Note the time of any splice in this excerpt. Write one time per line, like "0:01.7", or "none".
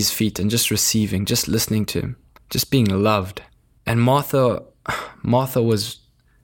0:02.4
0:03.5